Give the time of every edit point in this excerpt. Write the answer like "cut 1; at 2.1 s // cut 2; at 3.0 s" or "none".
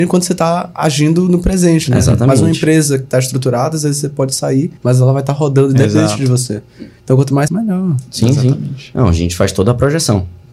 cut 1; at 4.8 s // cut 2; at 7.5 s